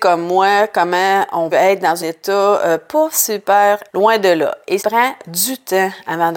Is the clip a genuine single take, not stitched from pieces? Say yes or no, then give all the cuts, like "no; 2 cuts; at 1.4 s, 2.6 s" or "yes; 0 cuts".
no; 4 cuts; at 1.5 s, 2.0 s, 3.9 s, 4.8 s